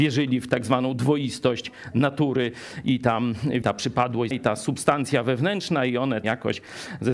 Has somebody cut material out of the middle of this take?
yes; 3 cuts; at 3.6 s, 4.3 s, 6.2 s

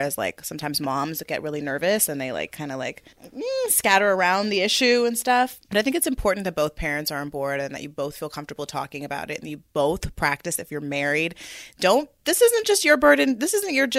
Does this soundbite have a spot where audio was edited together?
yes; 3 cuts; at 3.1 s, 5.6 s, 10.6 s

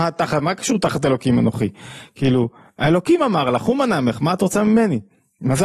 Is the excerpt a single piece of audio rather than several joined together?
yes; 0 cuts

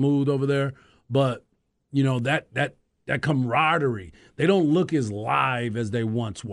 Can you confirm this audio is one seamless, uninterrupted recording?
yes; 0 cuts

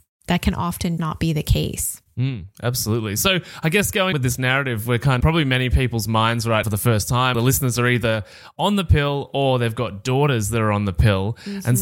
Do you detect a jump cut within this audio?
yes; 5 cuts; at 1.0 s, 4.1 s, 5.2 s, 6.6 s, 7.3 s

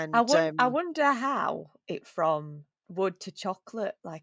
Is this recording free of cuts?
no; 1 cut; at 2.0 s

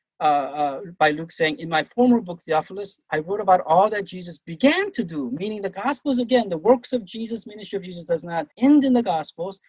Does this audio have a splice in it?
yes; 1 cut; at 8.5 s

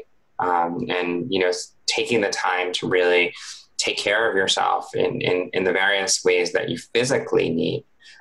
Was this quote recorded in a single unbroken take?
yes; 0 cuts

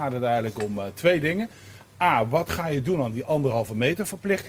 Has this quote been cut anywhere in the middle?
no; 0 cuts

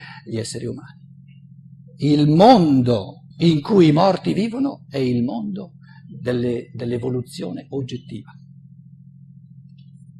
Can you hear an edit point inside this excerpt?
yes; 2 cuts; at 1.2 s, 3.3 s

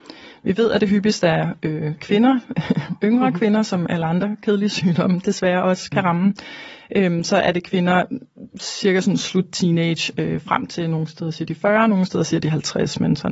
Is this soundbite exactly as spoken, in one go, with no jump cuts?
yes; 0 cuts

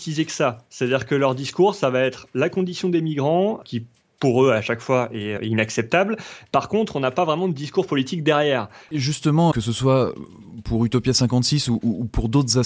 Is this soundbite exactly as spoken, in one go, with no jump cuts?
no; 2 cuts; at 5.4 s, 9.5 s

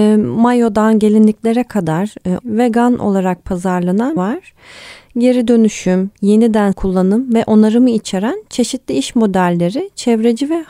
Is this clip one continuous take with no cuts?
no; 3 cuts; at 2.4 s, 4.2 s, 6.7 s

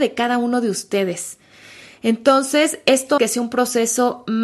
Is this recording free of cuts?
no; 1 cut; at 3.2 s

